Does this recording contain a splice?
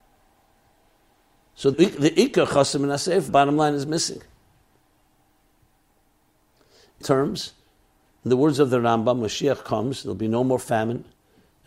yes; 3 cuts; at 1.7 s, 3.3 s, 7.0 s

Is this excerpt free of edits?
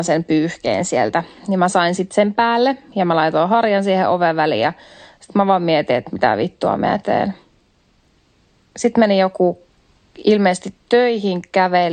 yes; 0 cuts

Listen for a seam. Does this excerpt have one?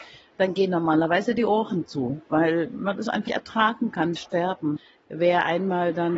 yes; 2 cuts; at 3.3 s, 4.2 s

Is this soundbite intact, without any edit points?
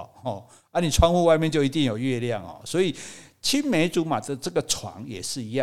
yes; 0 cuts

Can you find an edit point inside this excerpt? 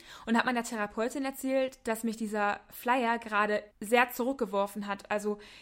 yes; 1 cut; at 3.7 s

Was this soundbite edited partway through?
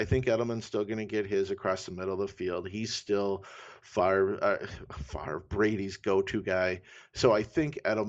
no; 0 cuts

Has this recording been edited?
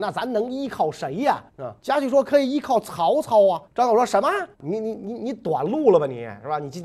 yes; 4 cuts; at 1.5 s, 1.8 s, 3.6 s, 4.5 s

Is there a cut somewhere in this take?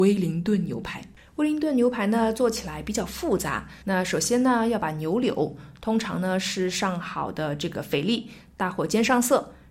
yes; 1 cut; at 3.8 s

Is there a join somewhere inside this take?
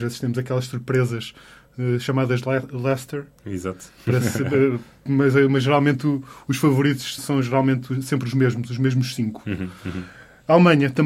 yes; 1 cut; at 7.2 s

